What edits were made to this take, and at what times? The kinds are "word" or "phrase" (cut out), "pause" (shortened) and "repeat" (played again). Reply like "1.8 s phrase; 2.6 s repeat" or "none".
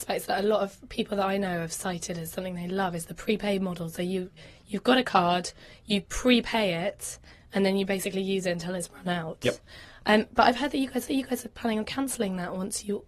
11.1 s repeat